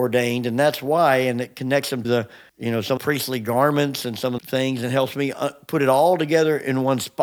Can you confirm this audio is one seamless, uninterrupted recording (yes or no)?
no